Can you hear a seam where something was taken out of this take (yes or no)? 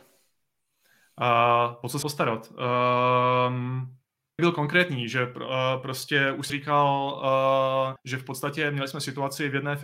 yes